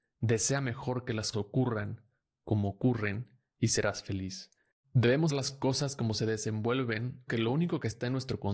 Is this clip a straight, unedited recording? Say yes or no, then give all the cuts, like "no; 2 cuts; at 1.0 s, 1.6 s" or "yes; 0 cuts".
no; 3 cuts; at 1.3 s, 5.3 s, 7.3 s